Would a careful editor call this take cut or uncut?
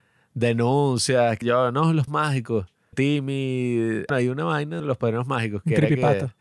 cut